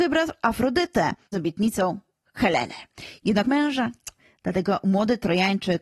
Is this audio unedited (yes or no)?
no